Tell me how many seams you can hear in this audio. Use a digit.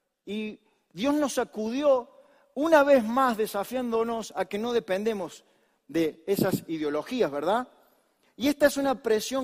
0